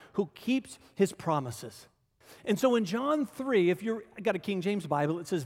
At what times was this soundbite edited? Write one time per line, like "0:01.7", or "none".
none